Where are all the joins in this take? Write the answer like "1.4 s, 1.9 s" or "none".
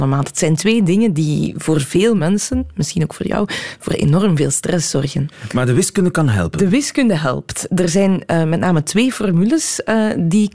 none